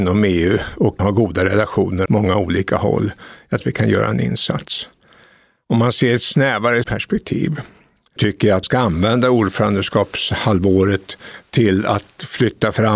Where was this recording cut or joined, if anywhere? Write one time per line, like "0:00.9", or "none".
0:01.0
0:02.1
0:03.6
0:06.8
0:08.2
0:08.6